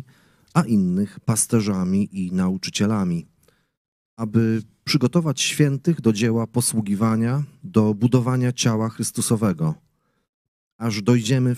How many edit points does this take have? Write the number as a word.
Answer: zero